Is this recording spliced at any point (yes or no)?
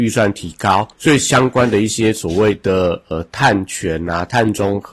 yes